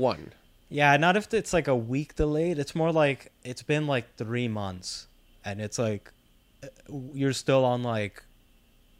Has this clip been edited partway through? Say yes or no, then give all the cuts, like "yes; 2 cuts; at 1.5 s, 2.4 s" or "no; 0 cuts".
no; 0 cuts